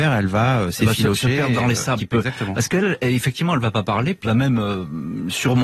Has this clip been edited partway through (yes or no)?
yes